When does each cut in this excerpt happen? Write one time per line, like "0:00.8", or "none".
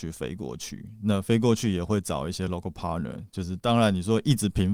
none